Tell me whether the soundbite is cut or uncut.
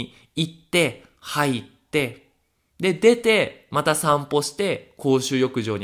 uncut